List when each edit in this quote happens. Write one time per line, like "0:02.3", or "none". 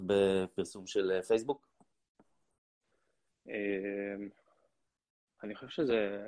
none